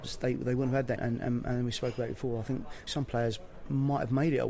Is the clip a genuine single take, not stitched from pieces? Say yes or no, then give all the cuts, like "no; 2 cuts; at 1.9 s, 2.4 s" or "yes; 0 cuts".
no; 2 cuts; at 1.0 s, 2.9 s